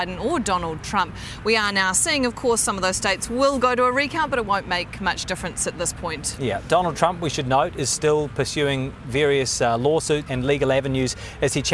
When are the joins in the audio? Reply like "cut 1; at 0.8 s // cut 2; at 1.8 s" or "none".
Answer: cut 1; at 10.3 s